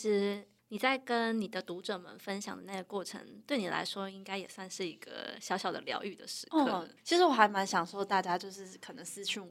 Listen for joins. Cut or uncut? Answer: cut